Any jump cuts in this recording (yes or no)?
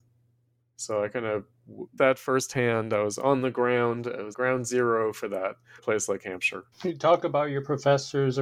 yes